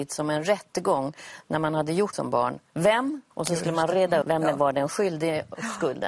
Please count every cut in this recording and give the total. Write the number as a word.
three